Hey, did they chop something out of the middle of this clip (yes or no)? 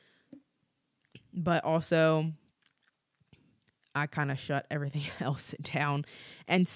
no